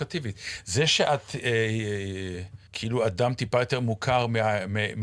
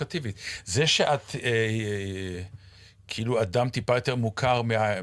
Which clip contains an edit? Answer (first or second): first